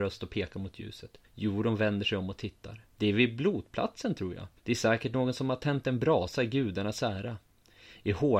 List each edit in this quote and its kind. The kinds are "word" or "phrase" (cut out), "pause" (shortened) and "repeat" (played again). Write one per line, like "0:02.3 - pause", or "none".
0:01.2 - pause
0:02.9 - pause
0:04.6 - pause

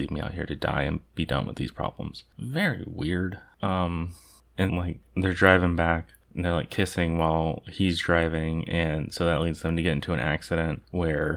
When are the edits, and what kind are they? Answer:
0:04.7 - word

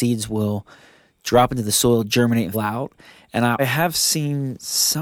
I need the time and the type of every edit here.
0:02.5 - word
0:03.6 - word

